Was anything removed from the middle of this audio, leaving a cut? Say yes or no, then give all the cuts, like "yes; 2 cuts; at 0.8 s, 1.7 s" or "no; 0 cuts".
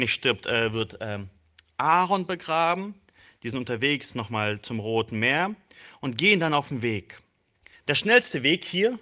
no; 0 cuts